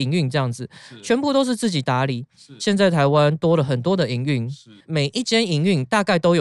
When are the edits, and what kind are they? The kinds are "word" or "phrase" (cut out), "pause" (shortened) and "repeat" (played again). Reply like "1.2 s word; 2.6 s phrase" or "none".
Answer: 4.8 s pause